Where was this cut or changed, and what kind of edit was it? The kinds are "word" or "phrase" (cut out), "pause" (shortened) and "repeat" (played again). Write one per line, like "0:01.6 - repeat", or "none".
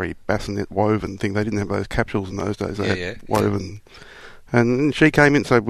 none

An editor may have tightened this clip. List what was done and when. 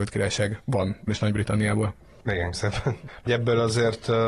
0:01.1 - word
0:02.5 - word
0:03.3 - word

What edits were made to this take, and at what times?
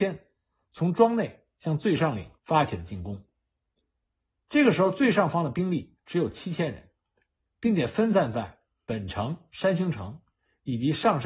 0:02.4 - pause

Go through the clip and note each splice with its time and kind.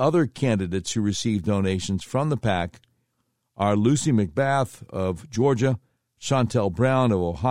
none

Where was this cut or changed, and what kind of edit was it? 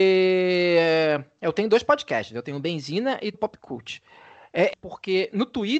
0:03.3 - word
0:04.7 - phrase

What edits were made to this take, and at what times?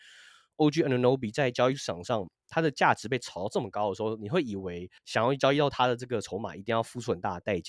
0:05.0 - pause

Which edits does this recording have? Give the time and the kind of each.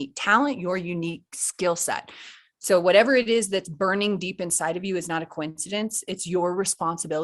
none

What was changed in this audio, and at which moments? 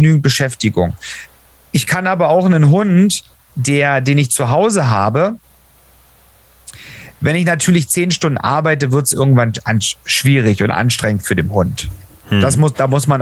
0:03.5 - word

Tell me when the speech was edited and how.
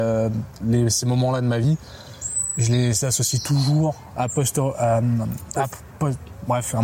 none

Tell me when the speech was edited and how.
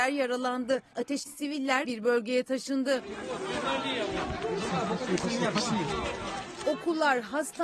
0:01.2 - word
0:01.8 - word

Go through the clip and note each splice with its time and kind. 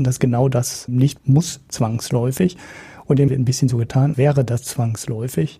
0:01.2 - word
0:03.3 - word
0:04.1 - word

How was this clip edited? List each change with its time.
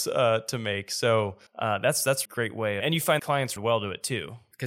0:01.5 - pause
0:02.2 - word
0:02.8 - phrase
0:03.2 - word
0:03.6 - word

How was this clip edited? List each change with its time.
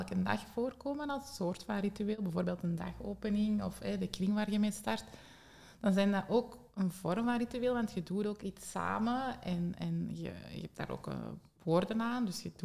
none

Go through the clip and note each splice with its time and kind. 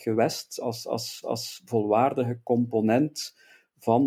0:01.2 - repeat

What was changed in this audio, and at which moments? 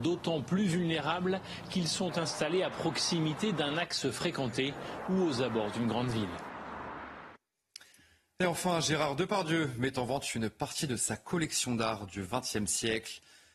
none

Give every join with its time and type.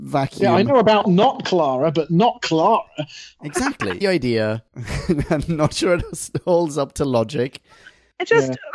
0:01.0 - word
0:04.0 - phrase

